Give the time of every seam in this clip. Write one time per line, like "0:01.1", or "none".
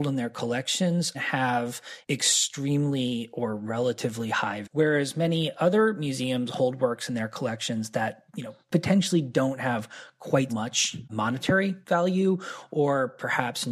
0:01.1
0:02.0
0:04.6
0:08.3
0:10.5